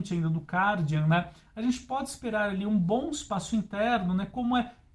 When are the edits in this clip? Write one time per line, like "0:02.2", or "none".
none